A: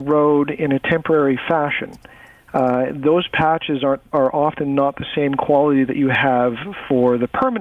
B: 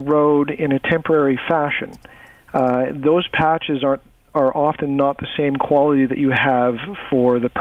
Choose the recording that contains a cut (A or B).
A